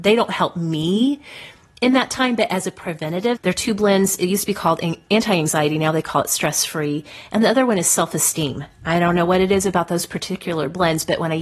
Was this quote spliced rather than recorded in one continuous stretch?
no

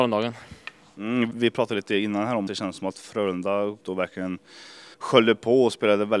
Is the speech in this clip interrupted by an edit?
yes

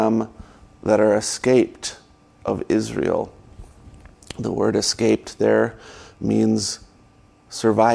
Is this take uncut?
yes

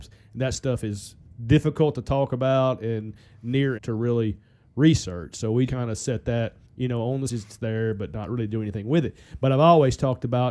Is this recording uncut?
no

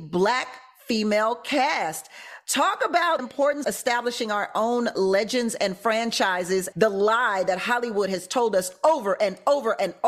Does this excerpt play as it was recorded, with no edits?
no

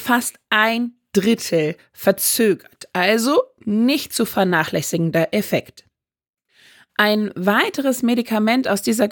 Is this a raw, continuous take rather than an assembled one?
yes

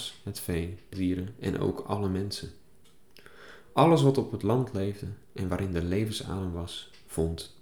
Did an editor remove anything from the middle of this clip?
yes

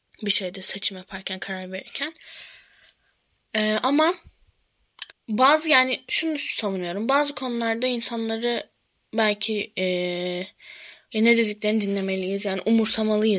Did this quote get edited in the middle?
yes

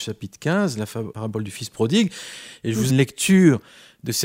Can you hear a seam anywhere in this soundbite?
yes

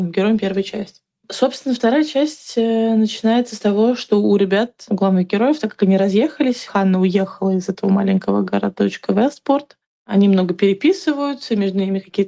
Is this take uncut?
yes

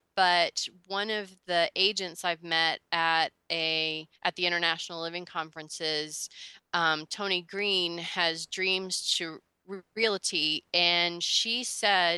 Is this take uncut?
no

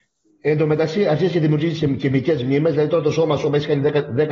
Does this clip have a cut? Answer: no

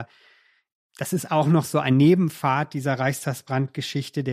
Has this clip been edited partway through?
no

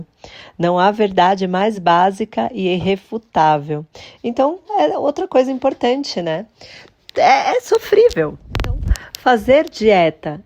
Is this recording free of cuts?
yes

